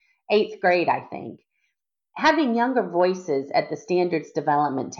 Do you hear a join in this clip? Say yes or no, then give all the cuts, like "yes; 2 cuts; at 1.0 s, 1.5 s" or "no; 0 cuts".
no; 0 cuts